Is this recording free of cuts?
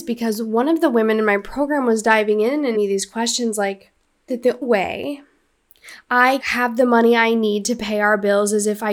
no; 4 cuts; at 2.7 s, 4.3 s, 4.6 s, 6.4 s

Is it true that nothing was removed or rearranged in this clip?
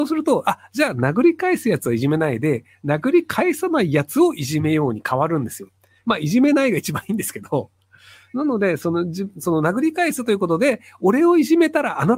yes; 0 cuts

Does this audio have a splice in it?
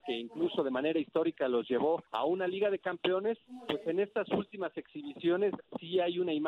yes; 1 cut; at 2.1 s

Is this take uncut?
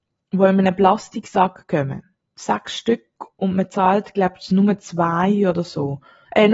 yes; 0 cuts

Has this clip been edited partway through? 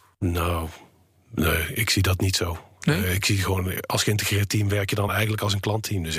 no; 0 cuts

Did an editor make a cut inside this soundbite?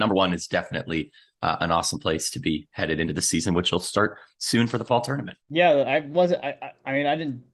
yes; 1 cut; at 5.4 s

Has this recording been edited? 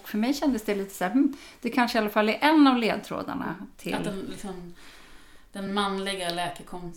no; 0 cuts

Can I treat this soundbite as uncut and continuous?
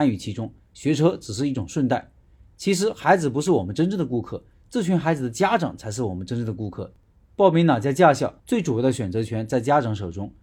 no; 1 cut; at 8.4 s

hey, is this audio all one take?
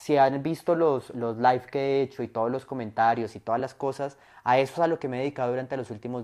yes; 0 cuts

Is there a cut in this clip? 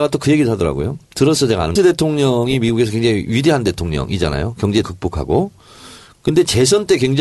yes; 3 cuts; at 1.0 s, 1.8 s, 4.8 s

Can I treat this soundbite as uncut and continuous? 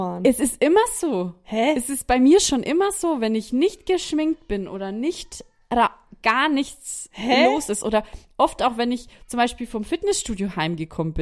yes; 0 cuts

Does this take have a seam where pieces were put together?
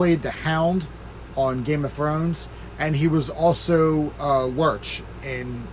no; 0 cuts

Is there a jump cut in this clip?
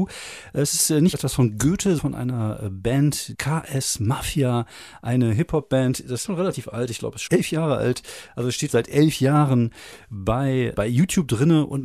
yes; 7 cuts; at 1.1 s, 2.0 s, 3.3 s, 6.2 s, 7.3 s, 8.7 s, 10.7 s

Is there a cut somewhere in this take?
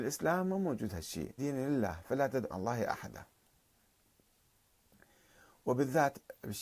yes; 2 cuts; at 1.4 s, 2.5 s

